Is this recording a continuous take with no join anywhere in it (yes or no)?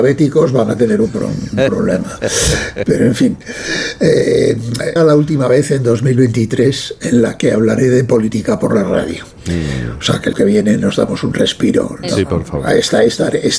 no